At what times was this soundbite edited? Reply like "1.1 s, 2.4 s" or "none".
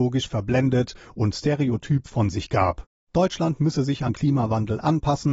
2.9 s, 4.1 s